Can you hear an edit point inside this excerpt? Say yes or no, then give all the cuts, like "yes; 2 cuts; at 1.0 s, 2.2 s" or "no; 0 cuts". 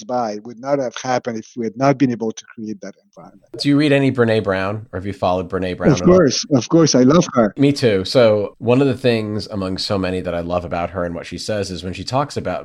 no; 0 cuts